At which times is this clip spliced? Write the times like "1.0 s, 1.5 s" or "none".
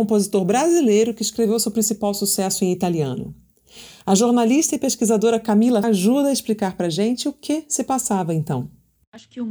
5.8 s